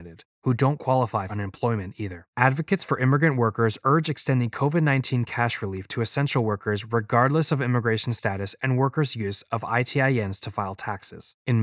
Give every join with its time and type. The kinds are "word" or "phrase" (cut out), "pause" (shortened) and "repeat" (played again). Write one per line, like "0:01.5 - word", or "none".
0:01.3 - word
0:02.3 - pause